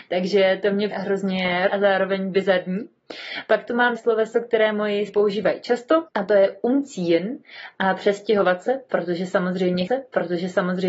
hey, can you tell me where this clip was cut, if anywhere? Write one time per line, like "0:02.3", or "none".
0:00.9
0:01.7
0:04.0
0:05.1
0:06.1
0:09.9